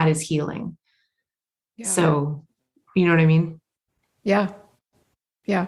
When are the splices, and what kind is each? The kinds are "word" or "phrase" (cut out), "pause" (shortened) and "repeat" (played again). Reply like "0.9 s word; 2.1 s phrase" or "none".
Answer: none